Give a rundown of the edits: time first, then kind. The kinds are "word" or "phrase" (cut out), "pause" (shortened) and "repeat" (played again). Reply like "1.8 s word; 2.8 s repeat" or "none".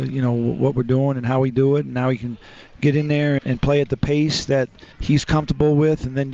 3.4 s word; 4.9 s pause

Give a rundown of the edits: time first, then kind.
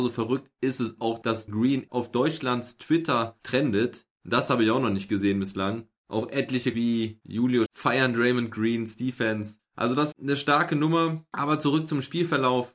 1.5 s word; 6.7 s word; 7.7 s word; 10.1 s word

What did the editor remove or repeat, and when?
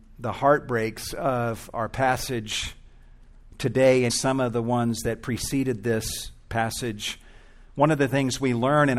4.1 s word

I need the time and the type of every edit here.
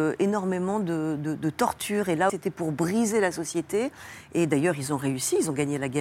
2.3 s word

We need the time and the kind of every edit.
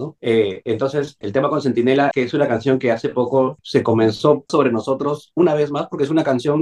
1.2 s word; 2.1 s word; 4.5 s phrase

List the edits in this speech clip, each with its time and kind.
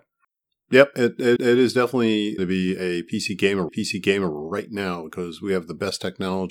1.4 s repeat; 2.4 s phrase; 3.7 s repeat

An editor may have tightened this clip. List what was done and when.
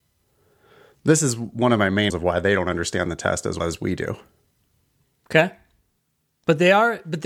2.1 s word; 3.6 s word

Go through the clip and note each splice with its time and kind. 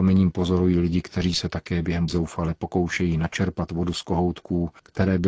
2.1 s word

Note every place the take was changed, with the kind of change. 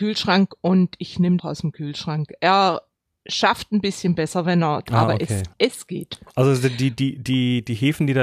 1.4 s phrase; 3.0 s pause; 4.9 s phrase; 5.5 s pause

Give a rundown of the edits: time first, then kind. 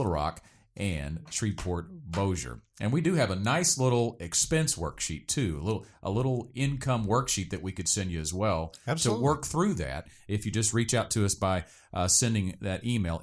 none

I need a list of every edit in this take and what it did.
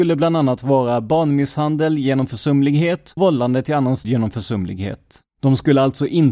3.2 s word; 4.0 s word; 5.3 s pause

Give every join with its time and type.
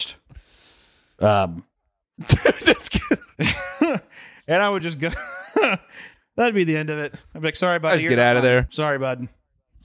none

